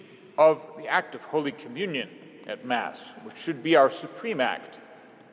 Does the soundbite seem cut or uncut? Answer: uncut